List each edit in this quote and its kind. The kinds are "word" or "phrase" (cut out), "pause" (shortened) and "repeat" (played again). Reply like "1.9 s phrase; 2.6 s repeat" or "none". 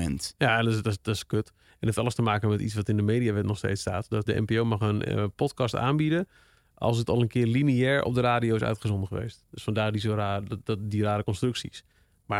4.3 s word